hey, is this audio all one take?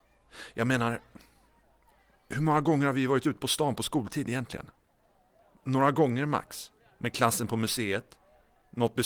yes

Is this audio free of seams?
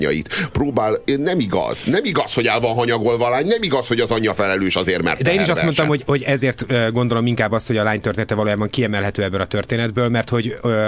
yes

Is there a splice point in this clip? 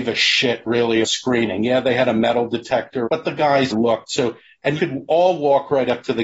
yes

